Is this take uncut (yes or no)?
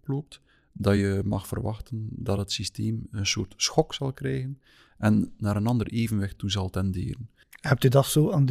yes